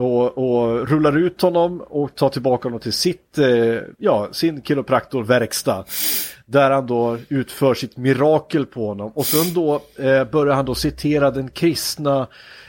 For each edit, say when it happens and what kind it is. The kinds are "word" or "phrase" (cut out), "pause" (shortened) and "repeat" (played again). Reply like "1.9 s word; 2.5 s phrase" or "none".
3.9 s pause